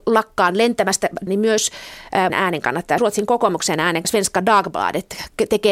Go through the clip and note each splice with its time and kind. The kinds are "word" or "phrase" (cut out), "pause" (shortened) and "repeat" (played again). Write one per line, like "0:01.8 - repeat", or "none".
0:01.3 - word
0:02.3 - word
0:03.0 - word
0:04.0 - word